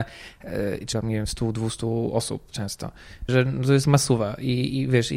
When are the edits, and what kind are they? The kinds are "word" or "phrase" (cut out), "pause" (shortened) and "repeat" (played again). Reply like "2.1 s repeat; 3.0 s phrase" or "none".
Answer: 0.9 s word; 2.5 s word; 3.3 s word; 3.8 s word